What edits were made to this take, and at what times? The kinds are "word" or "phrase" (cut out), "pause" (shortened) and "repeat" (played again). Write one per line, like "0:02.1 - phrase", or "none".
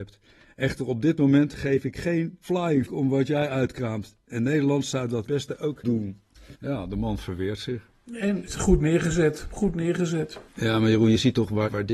0:02.9 - word
0:05.3 - word
0:05.8 - word
0:06.6 - pause
0:08.5 - word
0:10.5 - pause